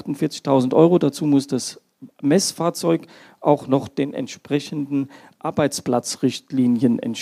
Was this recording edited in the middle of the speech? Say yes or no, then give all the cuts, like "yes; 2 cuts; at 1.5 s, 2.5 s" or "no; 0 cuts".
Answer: no; 0 cuts